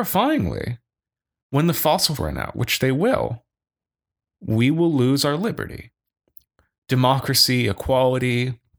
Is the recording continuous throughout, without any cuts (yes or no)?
no